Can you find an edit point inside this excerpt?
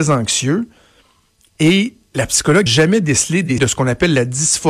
yes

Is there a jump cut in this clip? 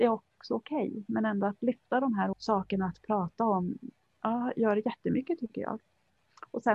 yes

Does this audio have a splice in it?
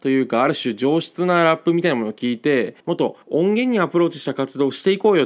yes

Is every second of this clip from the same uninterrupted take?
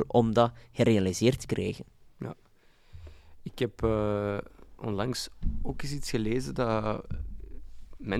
yes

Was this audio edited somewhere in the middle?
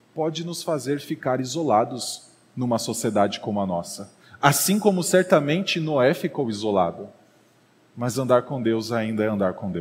no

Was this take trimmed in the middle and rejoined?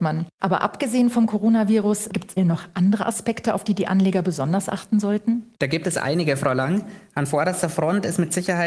yes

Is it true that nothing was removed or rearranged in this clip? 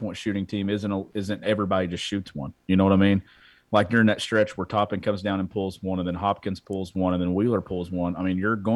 yes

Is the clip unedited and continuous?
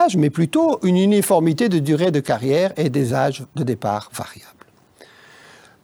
yes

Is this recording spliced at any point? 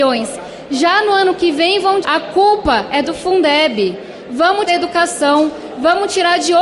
yes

